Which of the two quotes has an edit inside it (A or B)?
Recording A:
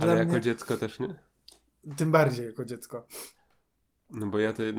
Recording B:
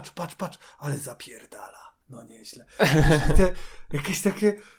B